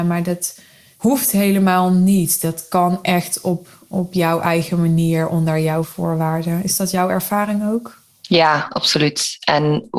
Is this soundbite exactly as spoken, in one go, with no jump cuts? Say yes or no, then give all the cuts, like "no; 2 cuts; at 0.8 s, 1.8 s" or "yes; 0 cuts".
yes; 0 cuts